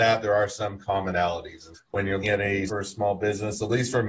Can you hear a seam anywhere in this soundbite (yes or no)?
yes